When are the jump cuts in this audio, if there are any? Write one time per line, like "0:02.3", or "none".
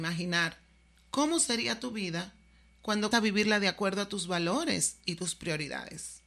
0:03.1